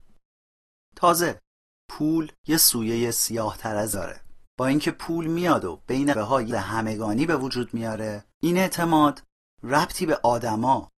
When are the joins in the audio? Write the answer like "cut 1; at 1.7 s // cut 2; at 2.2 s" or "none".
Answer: cut 1; at 2.4 s // cut 2; at 3.9 s // cut 3; at 4.5 s // cut 4; at 6.1 s // cut 5; at 6.5 s // cut 6; at 8.3 s